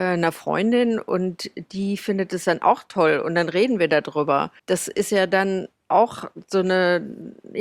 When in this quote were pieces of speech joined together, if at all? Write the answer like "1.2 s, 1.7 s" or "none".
4.6 s